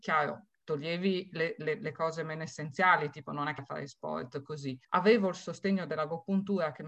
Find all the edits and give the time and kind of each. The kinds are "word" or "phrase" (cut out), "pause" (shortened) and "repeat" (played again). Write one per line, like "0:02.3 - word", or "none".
0:03.6 - word
0:04.8 - pause